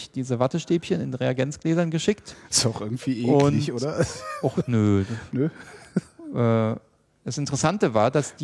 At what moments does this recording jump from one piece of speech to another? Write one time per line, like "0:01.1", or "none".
none